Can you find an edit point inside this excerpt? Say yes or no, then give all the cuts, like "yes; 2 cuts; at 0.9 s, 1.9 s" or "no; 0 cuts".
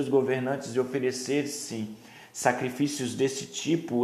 no; 0 cuts